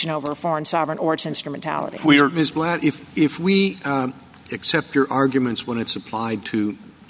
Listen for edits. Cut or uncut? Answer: uncut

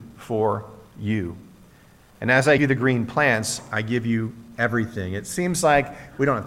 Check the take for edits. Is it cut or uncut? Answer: cut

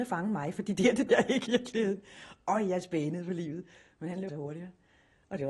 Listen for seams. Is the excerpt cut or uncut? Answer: cut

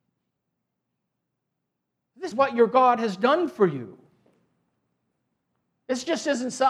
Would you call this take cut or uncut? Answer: cut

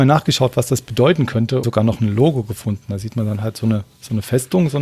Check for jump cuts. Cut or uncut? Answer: cut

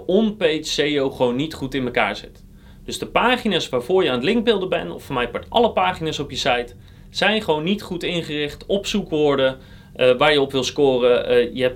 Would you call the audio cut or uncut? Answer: uncut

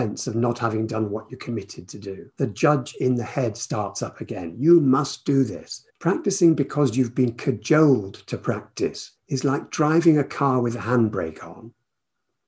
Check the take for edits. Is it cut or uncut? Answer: cut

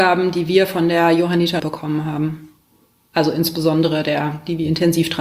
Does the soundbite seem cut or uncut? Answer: cut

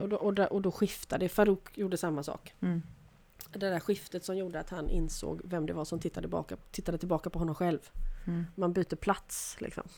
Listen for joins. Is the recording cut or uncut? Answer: cut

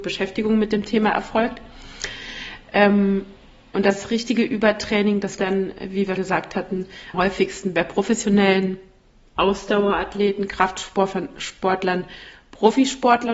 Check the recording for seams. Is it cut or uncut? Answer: cut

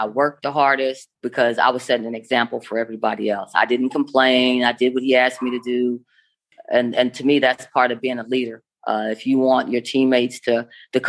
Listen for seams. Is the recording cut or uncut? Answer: cut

